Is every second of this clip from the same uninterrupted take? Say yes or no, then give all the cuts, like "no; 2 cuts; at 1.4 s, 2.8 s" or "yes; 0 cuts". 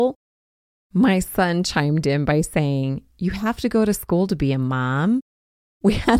yes; 0 cuts